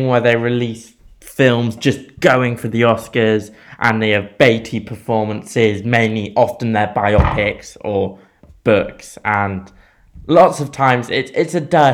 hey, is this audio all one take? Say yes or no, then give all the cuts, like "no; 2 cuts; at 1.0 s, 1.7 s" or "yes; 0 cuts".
yes; 0 cuts